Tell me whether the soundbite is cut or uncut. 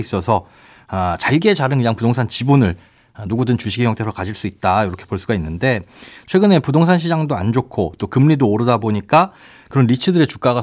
uncut